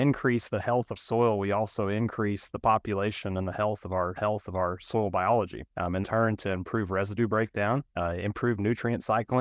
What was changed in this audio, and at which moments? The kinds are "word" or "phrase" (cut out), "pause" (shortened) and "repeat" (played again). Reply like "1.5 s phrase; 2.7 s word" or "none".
1.0 s word; 4.2 s repeat; 6.0 s phrase; 7.9 s pause

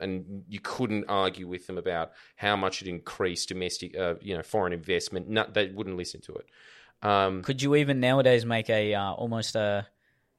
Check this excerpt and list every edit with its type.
none

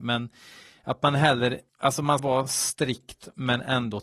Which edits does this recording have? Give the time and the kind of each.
1.7 s pause; 2.2 s word

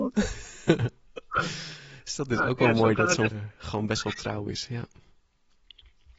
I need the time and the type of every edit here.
3.3 s word

